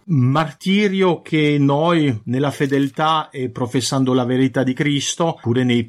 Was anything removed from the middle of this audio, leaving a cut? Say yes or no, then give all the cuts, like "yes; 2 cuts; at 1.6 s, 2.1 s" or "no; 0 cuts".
no; 0 cuts